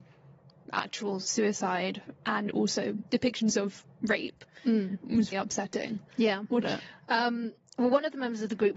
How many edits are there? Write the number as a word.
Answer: three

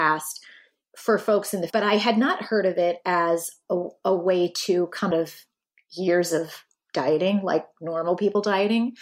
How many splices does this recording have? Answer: two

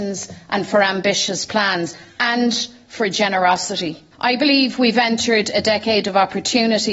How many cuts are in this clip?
one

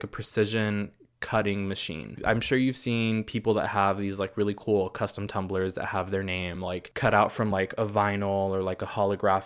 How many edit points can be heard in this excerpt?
zero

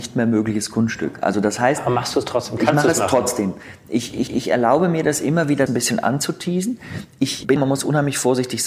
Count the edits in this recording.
three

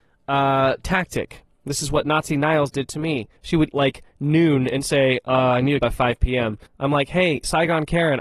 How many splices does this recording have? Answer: four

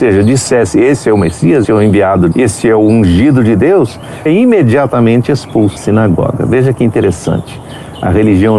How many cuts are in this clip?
four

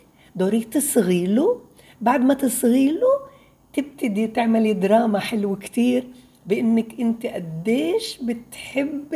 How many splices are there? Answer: zero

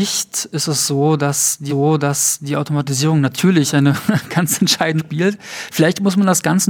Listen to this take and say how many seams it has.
two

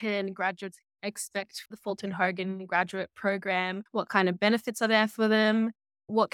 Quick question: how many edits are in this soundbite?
two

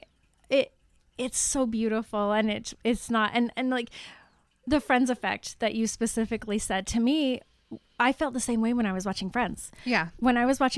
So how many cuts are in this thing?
zero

